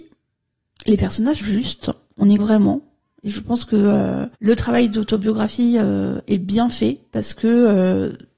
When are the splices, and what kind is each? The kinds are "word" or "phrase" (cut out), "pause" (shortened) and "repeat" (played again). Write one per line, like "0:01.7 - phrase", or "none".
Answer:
0:01.4 - word
0:02.4 - word
0:04.3 - pause